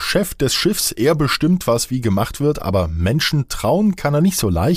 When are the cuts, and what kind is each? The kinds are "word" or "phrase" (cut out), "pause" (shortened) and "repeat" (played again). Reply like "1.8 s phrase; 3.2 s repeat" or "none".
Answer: none